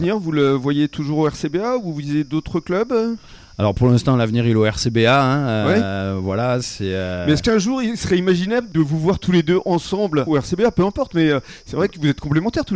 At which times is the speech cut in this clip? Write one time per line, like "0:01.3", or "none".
0:10.3